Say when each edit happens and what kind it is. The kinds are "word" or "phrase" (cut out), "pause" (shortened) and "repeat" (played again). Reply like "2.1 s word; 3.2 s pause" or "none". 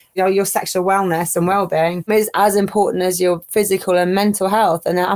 none